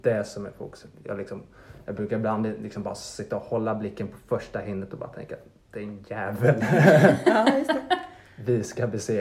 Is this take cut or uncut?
uncut